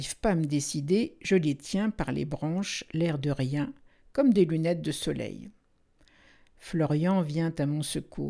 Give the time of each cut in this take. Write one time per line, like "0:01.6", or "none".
none